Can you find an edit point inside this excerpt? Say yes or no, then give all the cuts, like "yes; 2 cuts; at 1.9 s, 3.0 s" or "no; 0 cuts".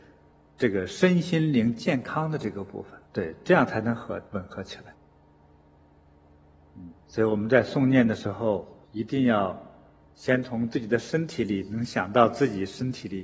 yes; 4 cuts; at 3.0 s, 4.3 s, 7.0 s, 8.8 s